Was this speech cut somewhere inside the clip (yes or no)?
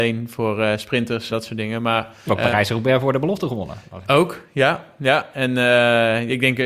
yes